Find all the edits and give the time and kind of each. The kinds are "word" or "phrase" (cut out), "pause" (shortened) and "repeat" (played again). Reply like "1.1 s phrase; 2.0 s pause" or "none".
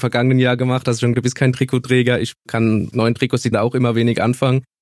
1.1 s word; 2.9 s word; 3.5 s word